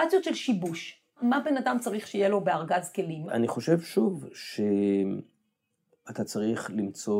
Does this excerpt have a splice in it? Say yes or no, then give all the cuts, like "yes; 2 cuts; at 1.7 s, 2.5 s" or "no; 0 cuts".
no; 0 cuts